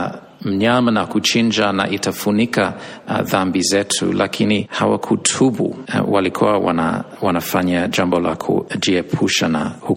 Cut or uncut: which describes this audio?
uncut